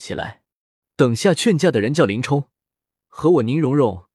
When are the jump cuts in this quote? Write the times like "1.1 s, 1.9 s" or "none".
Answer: none

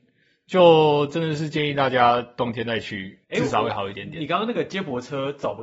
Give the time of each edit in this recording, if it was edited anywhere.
3.2 s

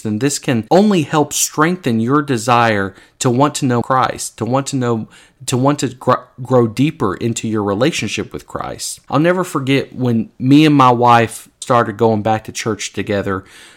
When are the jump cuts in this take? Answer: 3.8 s, 11.6 s

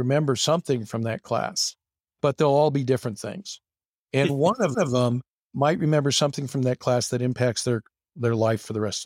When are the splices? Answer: 4.7 s

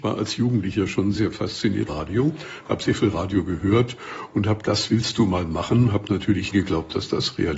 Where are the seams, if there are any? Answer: 1.2 s, 1.9 s, 4.6 s, 6.5 s

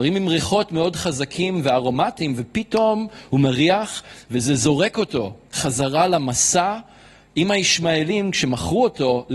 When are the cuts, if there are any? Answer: none

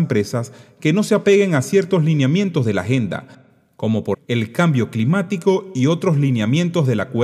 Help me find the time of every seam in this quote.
4.1 s

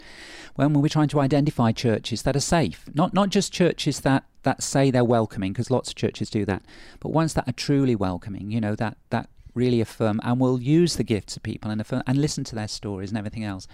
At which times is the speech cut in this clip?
none

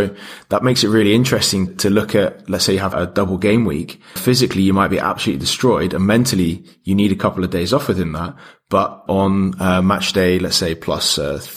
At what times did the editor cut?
1.7 s, 2.9 s, 4.2 s, 9.1 s

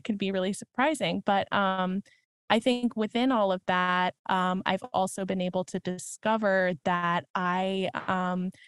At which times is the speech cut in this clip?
none

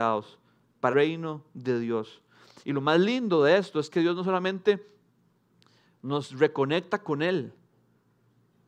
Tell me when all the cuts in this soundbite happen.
0.9 s

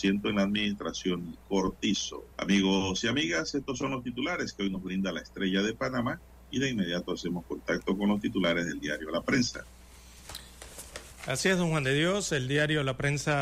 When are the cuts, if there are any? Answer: 2.3 s

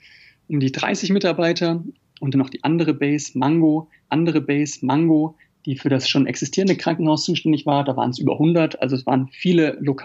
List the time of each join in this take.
2.3 s, 4.1 s

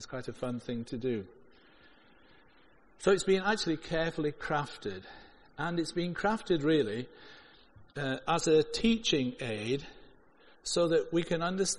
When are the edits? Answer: none

